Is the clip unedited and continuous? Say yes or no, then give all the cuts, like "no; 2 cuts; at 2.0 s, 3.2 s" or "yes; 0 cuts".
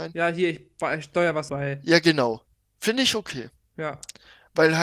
no; 1 cut; at 1.5 s